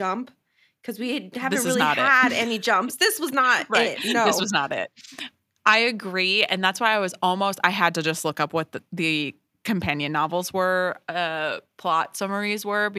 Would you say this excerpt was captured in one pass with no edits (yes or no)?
yes